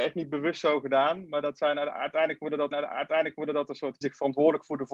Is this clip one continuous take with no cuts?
no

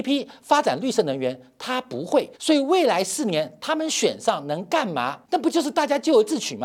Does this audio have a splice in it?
yes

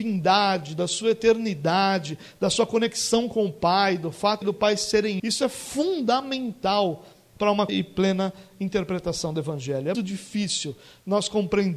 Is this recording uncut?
no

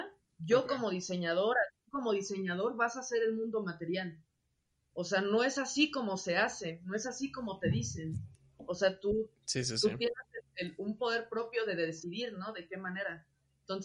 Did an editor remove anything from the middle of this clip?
no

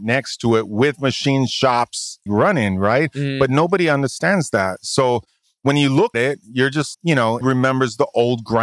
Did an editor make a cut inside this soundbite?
yes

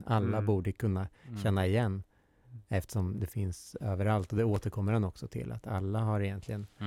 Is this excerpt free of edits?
yes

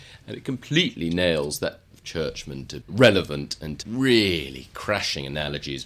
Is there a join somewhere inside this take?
yes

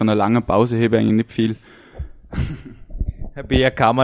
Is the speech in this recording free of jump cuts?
yes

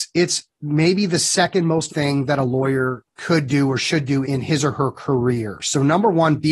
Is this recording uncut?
no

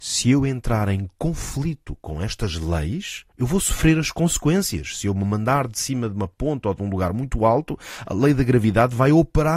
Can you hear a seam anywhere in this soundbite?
yes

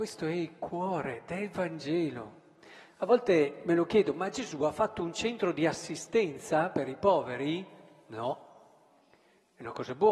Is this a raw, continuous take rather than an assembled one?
yes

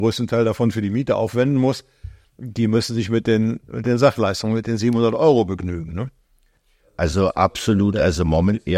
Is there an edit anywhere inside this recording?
no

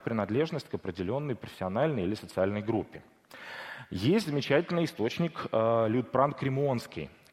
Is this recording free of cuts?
yes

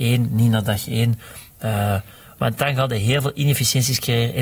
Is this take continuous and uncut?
yes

